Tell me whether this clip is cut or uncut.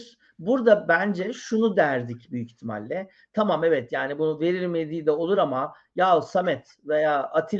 uncut